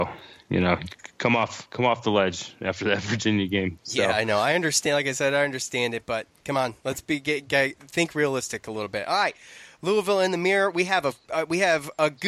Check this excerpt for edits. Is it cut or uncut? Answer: uncut